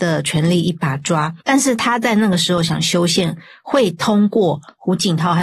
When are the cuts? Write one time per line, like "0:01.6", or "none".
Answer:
0:01.4